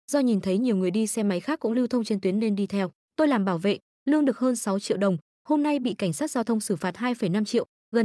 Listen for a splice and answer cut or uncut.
cut